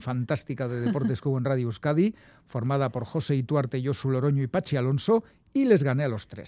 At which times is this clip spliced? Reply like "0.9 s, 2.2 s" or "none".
none